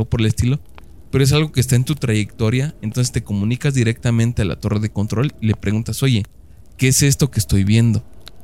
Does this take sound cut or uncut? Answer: uncut